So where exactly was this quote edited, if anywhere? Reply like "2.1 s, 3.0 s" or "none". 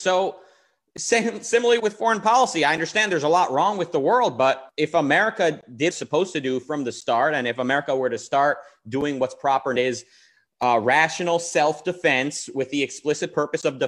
1.8 s, 4.7 s, 5.9 s, 9.8 s